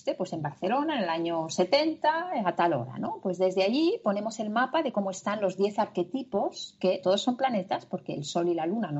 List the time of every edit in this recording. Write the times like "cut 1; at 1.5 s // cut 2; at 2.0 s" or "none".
cut 1; at 7.0 s